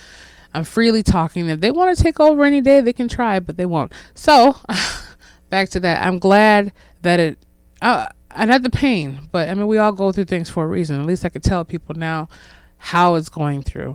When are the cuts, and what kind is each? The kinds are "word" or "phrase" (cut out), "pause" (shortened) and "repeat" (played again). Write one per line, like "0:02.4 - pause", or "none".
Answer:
0:06.8 - pause